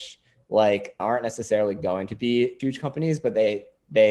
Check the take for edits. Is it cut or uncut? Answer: cut